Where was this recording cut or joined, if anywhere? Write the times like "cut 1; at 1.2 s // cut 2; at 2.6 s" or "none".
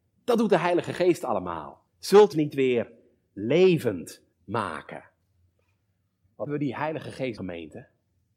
cut 1; at 1.9 s // cut 2; at 2.3 s // cut 3; at 4.3 s // cut 4; at 6.5 s // cut 5; at 7.4 s